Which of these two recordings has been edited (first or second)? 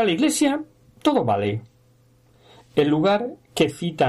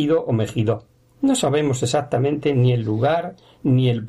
second